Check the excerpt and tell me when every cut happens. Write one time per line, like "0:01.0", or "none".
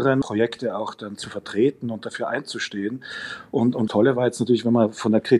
0:03.9